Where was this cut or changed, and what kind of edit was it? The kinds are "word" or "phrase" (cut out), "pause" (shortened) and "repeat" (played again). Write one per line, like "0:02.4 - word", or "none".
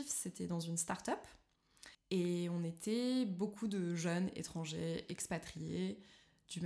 0:01.9 - pause